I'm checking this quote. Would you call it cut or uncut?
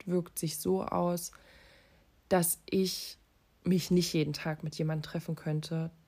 uncut